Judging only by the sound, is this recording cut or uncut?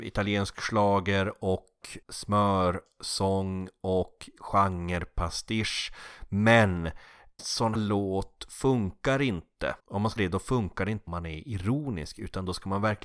cut